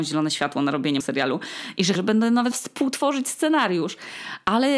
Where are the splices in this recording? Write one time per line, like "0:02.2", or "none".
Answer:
0:01.0
0:01.9
0:02.5